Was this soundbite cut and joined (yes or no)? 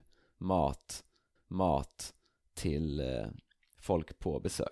yes